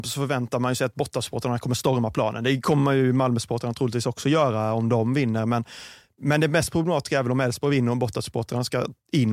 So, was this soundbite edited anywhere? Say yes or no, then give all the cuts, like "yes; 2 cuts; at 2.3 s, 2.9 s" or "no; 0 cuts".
no; 0 cuts